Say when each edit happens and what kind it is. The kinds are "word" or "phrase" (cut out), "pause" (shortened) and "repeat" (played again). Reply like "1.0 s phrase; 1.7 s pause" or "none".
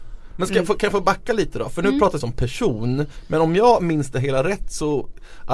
2.2 s phrase